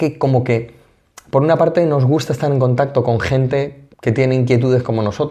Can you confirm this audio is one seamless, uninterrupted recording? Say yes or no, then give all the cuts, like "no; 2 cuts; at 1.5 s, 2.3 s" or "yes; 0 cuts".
no; 1 cut; at 3.9 s